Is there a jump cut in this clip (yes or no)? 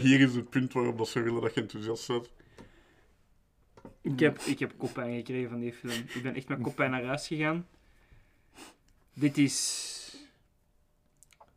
no